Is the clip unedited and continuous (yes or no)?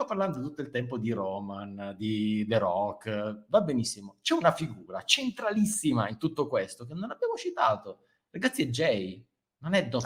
yes